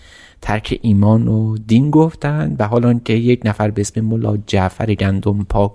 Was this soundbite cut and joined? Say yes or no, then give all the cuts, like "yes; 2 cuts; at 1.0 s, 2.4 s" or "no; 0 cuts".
no; 0 cuts